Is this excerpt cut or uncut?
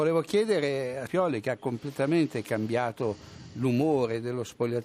cut